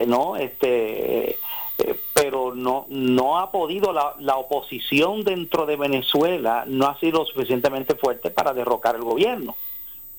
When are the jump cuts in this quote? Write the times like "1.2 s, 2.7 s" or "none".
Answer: none